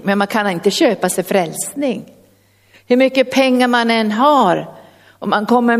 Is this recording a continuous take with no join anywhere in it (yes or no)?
yes